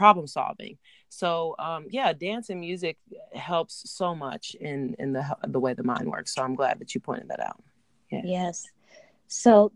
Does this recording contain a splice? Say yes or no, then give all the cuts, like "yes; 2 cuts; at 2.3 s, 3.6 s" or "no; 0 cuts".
no; 0 cuts